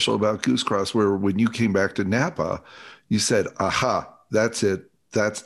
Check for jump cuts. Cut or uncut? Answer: uncut